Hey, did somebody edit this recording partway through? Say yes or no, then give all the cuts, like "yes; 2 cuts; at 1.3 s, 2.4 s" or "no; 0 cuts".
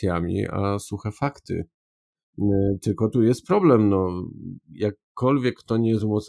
no; 0 cuts